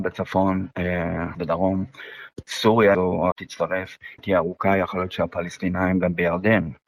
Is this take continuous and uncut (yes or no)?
no